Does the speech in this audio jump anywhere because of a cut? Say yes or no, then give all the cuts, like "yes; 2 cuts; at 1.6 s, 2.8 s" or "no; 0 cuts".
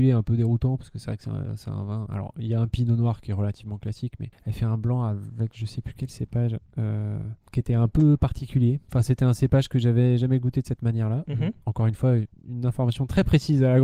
yes; 2 cuts; at 4.3 s, 7.4 s